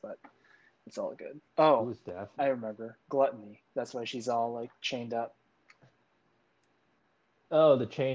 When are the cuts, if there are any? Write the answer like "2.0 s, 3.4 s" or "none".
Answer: 1.5 s, 3.0 s